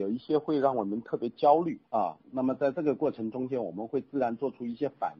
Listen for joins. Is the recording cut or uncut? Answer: cut